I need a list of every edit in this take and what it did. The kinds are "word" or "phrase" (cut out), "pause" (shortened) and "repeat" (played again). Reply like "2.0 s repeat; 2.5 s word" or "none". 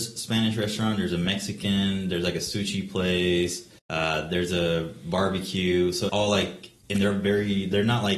3.8 s pause; 6.1 s word; 6.8 s pause